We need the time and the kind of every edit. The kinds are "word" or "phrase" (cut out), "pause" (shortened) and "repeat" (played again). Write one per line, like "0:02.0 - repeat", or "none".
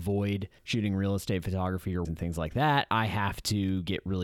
0:02.0 - word